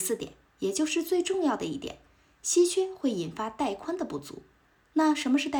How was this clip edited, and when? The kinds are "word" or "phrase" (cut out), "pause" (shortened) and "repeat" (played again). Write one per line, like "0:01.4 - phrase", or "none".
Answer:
none